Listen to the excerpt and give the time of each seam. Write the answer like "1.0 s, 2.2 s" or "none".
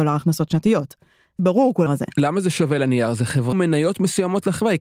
1.4 s, 1.9 s, 3.5 s